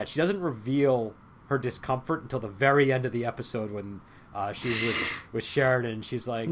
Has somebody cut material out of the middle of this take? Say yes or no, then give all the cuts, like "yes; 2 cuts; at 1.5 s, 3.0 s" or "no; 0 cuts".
no; 0 cuts